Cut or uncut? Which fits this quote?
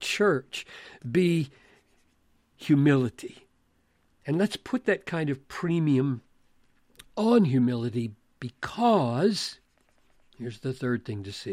uncut